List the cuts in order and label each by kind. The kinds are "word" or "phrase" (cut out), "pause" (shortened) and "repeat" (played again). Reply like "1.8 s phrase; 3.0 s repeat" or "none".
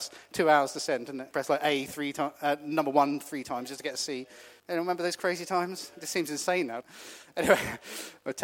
1.3 s phrase; 4.6 s pause; 6.8 s word